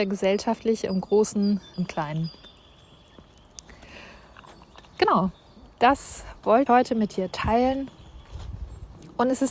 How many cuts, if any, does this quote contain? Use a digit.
3